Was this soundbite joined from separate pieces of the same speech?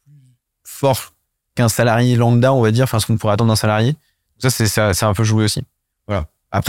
no; 0 cuts

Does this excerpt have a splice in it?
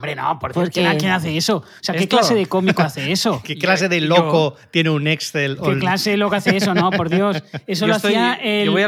no; 0 cuts

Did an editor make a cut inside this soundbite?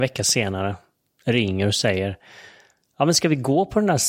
no; 0 cuts

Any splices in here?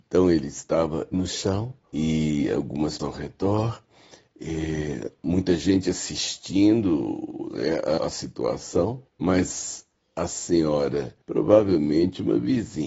yes; 6 cuts; at 1.1 s, 1.8 s, 3.0 s, 8.0 s, 9.1 s, 11.2 s

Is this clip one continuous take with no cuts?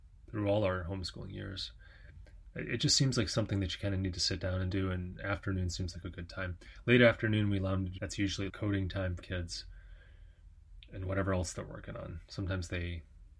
no; 3 cuts; at 8.0 s, 8.5 s, 9.2 s

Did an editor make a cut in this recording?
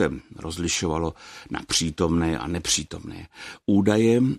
no; 0 cuts

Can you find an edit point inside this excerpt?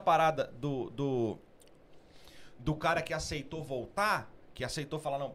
no; 0 cuts

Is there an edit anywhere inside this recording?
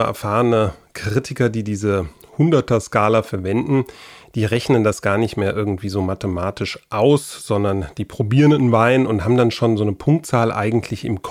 no; 0 cuts

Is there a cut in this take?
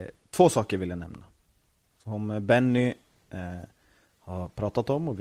no; 0 cuts

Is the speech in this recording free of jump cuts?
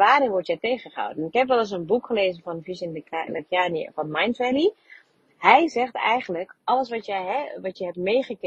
yes; 0 cuts

